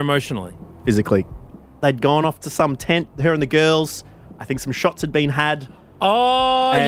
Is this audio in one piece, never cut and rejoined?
yes; 0 cuts

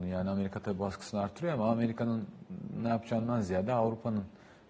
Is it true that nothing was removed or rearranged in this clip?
yes; 0 cuts

